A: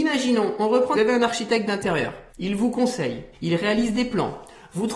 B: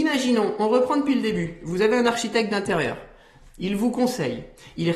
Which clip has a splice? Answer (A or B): A